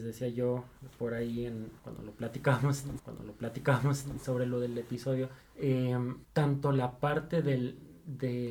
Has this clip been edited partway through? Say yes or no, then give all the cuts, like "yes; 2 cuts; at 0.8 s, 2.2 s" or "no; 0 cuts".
yes; 2 cuts; at 3.0 s, 6.2 s